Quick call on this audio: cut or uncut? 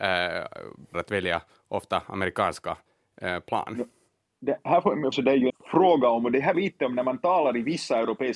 cut